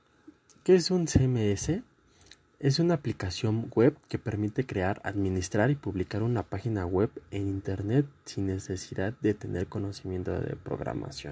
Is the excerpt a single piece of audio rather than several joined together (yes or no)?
yes